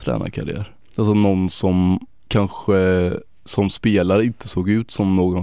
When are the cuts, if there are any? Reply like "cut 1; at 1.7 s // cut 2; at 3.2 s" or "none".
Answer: none